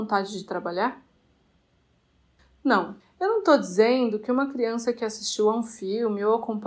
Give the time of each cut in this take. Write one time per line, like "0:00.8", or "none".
0:03.0